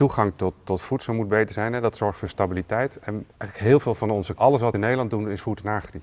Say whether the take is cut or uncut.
cut